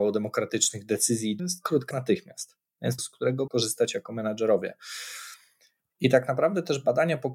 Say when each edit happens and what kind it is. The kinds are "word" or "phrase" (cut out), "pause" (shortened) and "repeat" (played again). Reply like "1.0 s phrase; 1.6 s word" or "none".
1.4 s phrase; 1.9 s phrase; 3.0 s phrase; 3.5 s phrase